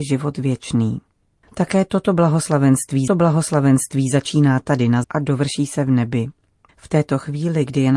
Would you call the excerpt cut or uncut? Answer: cut